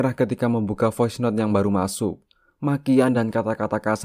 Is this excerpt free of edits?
yes; 0 cuts

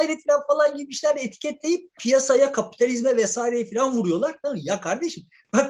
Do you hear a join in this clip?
yes; 1 cut; at 2.0 s

